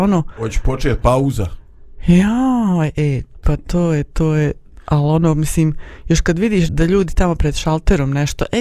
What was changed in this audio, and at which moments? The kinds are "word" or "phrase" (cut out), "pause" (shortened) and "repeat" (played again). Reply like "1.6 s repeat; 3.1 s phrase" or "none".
6.7 s word